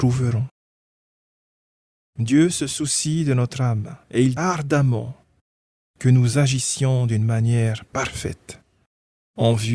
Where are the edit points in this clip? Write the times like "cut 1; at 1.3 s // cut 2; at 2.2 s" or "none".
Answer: cut 1; at 4.0 s // cut 2; at 4.4 s